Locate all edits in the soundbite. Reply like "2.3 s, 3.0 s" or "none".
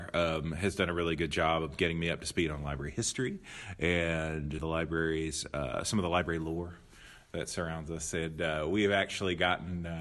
4.6 s